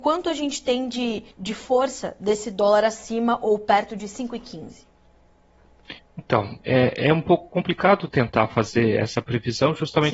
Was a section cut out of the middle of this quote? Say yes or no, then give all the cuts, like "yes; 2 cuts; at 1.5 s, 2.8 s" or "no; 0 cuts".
yes; 2 cuts; at 1.3 s, 6.0 s